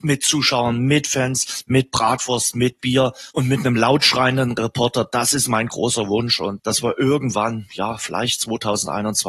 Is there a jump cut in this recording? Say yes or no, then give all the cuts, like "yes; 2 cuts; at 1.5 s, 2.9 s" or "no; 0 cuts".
yes; 2 cuts; at 3.3 s, 6.6 s